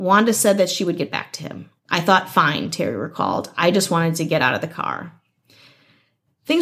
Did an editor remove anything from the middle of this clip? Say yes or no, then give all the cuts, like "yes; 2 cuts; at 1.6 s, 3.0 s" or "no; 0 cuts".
no; 0 cuts